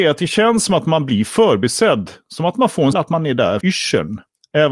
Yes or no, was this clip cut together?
yes